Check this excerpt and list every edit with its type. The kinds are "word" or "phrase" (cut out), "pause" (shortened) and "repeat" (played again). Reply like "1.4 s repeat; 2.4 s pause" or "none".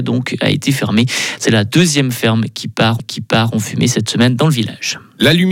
3.0 s repeat